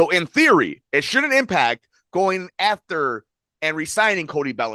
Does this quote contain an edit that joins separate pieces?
no; 0 cuts

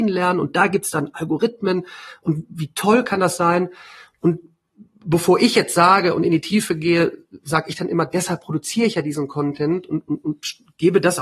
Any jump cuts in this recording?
no; 0 cuts

